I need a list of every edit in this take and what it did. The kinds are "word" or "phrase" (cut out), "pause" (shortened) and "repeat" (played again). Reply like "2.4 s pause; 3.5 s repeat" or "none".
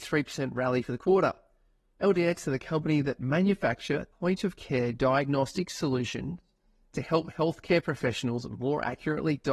4.1 s word